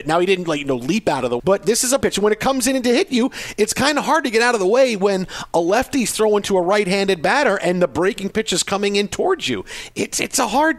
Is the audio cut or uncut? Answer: cut